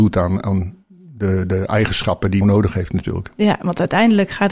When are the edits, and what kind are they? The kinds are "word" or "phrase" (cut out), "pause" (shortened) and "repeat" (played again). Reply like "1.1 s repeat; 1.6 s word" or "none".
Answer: 2.4 s phrase